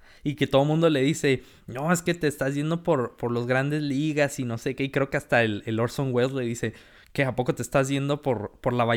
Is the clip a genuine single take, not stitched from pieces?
yes; 0 cuts

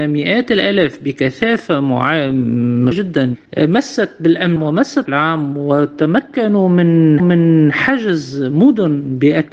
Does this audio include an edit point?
yes; 5 cuts; at 2.9 s, 3.5 s, 4.6 s, 5.1 s, 7.2 s

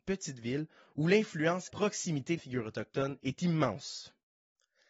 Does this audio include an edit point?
yes; 2 cuts; at 1.7 s, 2.4 s

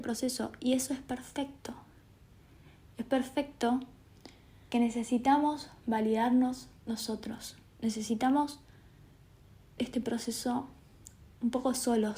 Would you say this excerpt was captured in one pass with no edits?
no; 2 cuts; at 4.7 s, 9.8 s

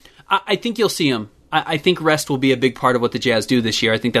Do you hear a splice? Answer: no; 0 cuts

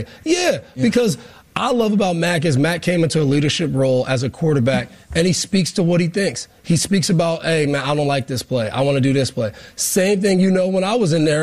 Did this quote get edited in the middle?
no; 0 cuts

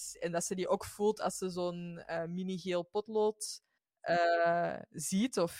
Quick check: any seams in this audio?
yes; 1 cut; at 3.8 s

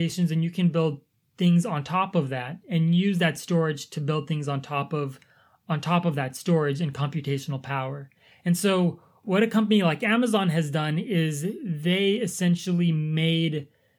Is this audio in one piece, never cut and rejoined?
yes; 0 cuts

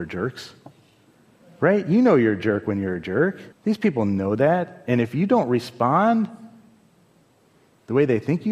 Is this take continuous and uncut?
no; 1 cut; at 3.5 s

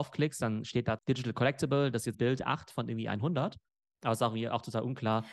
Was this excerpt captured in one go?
no; 2 cuts; at 1.0 s, 2.1 s

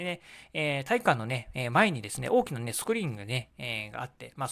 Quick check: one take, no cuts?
yes; 0 cuts

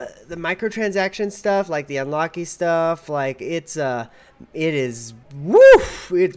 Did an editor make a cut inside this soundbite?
yes; 1 cut; at 5.2 s

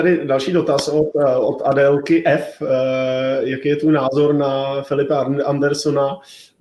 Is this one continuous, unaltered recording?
yes; 0 cuts

